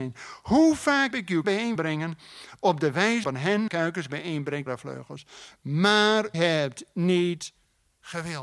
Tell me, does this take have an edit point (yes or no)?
yes